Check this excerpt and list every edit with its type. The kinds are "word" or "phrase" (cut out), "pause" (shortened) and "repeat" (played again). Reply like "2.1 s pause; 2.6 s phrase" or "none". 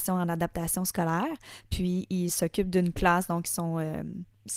none